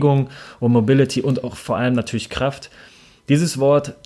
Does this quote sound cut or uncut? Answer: uncut